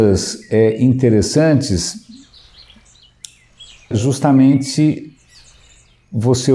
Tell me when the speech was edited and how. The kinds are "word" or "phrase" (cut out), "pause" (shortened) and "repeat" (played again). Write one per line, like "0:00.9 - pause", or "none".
0:03.9 - word

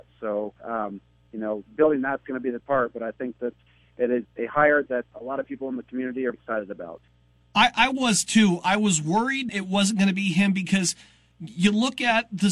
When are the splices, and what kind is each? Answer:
0:02.6 - word
0:04.2 - word
0:06.3 - word
0:09.5 - word

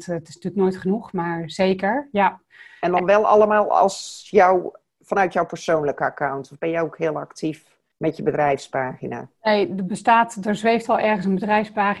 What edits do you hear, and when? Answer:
none

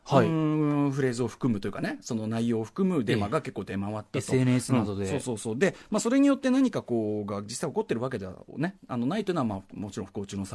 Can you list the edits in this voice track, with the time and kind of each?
none

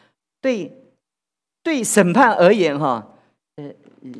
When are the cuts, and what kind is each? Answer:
none

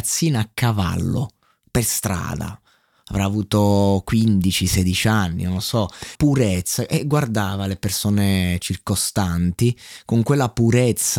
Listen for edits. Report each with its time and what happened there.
0:06.2 - word

